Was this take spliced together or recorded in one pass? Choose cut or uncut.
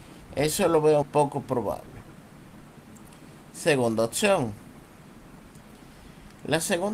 cut